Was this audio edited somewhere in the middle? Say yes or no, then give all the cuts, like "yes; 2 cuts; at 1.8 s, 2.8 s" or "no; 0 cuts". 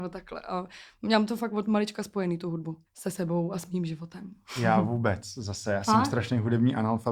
yes; 1 cut; at 2.9 s